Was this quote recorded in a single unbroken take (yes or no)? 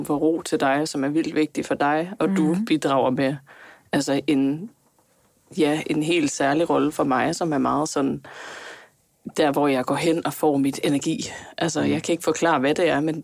yes